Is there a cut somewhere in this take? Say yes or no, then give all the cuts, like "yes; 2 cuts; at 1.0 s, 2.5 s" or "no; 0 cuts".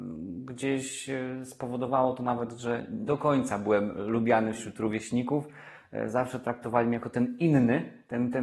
yes; 1 cut; at 3.1 s